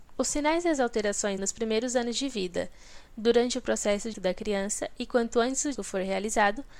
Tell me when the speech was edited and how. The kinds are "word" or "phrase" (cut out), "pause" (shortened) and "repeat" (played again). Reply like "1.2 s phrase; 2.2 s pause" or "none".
1.4 s word; 4.1 s word; 5.8 s word